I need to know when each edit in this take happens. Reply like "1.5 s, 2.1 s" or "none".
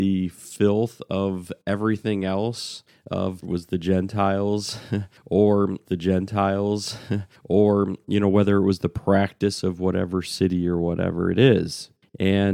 3.4 s, 5.8 s